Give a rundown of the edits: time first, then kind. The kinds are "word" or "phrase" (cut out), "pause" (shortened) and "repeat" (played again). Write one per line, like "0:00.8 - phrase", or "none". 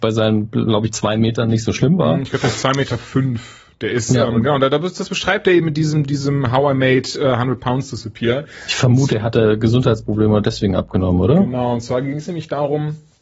none